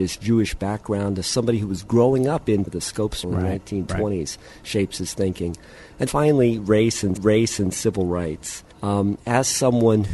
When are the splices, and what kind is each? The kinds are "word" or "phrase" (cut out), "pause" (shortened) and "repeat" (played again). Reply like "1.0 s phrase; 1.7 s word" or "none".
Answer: 2.7 s phrase; 3.2 s word; 6.1 s word; 7.2 s repeat; 8.7 s pause